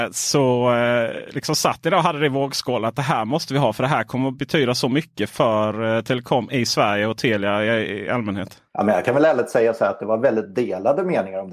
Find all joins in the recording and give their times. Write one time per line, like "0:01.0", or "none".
0:05.3
0:08.7